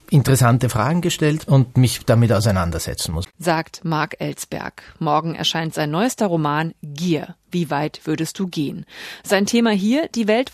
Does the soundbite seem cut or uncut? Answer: cut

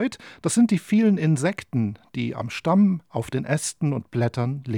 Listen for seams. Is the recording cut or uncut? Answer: uncut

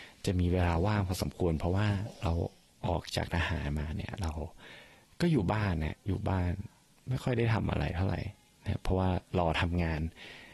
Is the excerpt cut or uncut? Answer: uncut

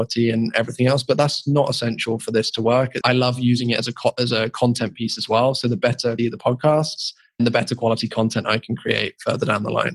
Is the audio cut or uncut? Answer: cut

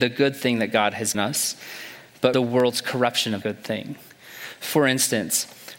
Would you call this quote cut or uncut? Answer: cut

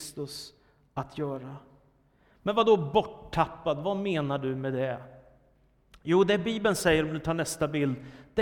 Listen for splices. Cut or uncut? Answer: uncut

